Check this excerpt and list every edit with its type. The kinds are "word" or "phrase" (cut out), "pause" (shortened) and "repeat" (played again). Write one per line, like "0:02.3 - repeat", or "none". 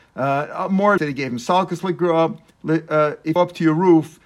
0:01.0 - word
0:03.4 - phrase